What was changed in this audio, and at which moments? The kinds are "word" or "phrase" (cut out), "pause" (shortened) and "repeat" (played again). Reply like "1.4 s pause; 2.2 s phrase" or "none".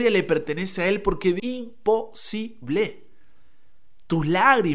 1.4 s phrase